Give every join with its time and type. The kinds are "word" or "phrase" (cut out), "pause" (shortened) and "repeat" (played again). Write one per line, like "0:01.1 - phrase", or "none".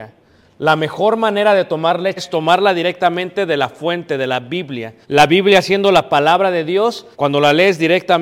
0:02.2 - word
0:05.0 - pause
0:07.1 - pause